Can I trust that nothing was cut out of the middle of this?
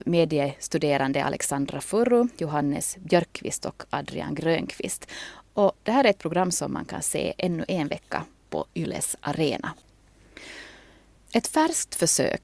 yes; 0 cuts

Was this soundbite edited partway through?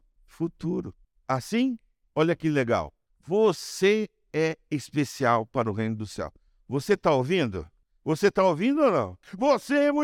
no; 0 cuts

